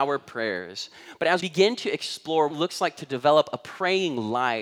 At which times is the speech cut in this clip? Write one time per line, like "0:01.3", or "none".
0:01.4
0:02.5